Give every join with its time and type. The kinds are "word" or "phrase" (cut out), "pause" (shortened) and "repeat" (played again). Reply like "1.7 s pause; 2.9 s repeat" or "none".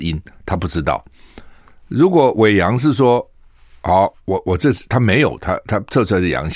none